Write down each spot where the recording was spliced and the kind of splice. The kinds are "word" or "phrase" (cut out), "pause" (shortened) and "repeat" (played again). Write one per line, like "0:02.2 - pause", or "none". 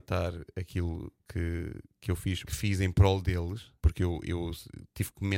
0:02.5 - phrase
0:03.8 - pause